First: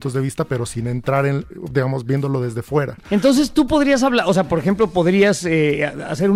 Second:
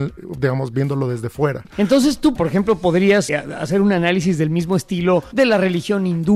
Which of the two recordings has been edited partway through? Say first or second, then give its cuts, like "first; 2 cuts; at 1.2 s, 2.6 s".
second; 2 cuts; at 2.4 s, 3.3 s